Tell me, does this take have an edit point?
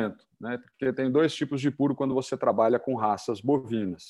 no; 0 cuts

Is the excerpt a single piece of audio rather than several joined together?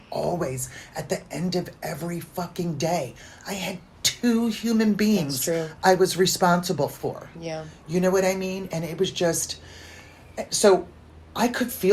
yes; 0 cuts

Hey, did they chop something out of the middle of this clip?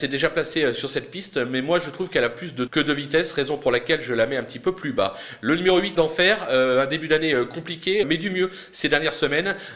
yes; 3 cuts; at 2.7 s, 5.9 s, 8.0 s

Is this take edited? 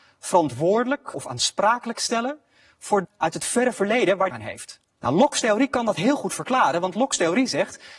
yes; 4 cuts; at 1.1 s, 3.0 s, 4.3 s, 4.9 s

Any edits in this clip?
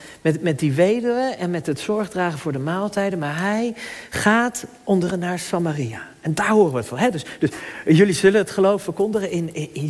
yes; 1 cut; at 5.1 s

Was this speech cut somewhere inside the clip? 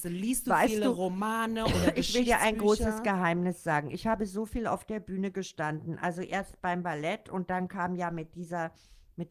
no; 0 cuts

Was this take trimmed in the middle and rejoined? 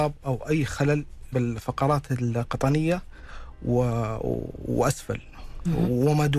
yes; 1 cut; at 1.3 s

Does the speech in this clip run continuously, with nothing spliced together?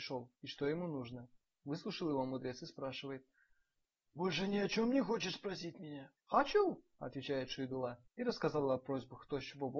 no; 3 cuts; at 1.4 s, 6.2 s, 8.1 s

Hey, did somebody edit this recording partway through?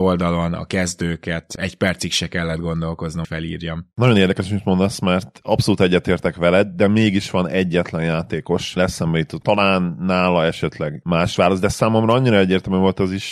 yes; 4 cuts; at 3.2 s, 8.8 s, 9.4 s, 11.0 s

